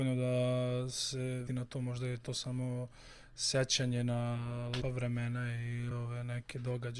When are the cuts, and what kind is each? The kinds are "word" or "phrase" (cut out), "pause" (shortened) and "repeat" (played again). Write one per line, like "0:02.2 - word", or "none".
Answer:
0:01.5 - word
0:04.8 - word
0:05.9 - word